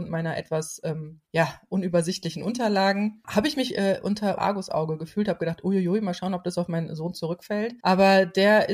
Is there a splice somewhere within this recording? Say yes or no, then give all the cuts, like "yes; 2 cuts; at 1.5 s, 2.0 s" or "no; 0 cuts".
yes; 4 cuts; at 1.2 s, 3.7 s, 4.4 s, 7.8 s